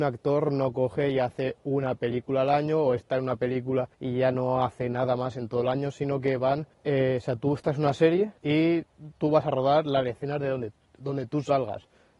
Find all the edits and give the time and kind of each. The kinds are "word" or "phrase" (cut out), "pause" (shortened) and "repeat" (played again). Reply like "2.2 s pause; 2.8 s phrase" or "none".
3.9 s pause; 6.7 s pause; 8.4 s pause